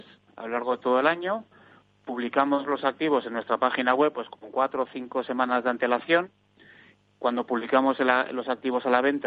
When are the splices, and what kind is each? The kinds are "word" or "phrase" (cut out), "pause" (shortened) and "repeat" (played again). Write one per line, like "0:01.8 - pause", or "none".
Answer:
none